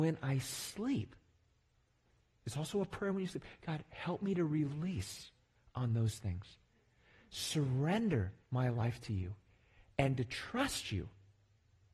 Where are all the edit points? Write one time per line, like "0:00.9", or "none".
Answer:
0:08.4